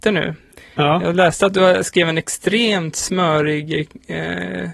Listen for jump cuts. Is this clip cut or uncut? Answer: uncut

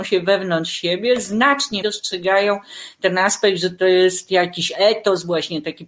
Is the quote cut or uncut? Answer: cut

